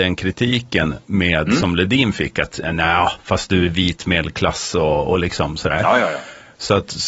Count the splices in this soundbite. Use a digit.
0